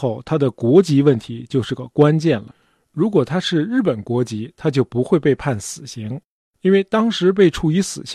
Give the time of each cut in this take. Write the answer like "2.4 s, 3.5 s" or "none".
none